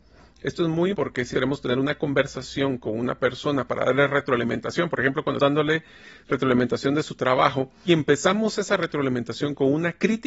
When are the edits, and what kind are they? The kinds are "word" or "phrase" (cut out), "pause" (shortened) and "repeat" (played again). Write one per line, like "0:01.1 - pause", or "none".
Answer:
0:00.9 - word
0:01.3 - word
0:05.4 - word
0:07.9 - word